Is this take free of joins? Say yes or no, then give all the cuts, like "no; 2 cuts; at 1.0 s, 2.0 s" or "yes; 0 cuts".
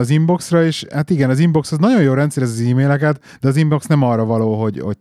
yes; 0 cuts